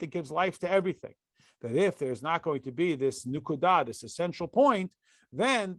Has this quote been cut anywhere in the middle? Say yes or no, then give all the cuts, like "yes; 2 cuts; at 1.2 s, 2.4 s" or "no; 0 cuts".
no; 0 cuts